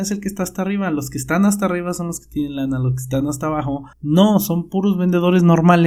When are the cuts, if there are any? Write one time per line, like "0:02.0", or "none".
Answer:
0:03.9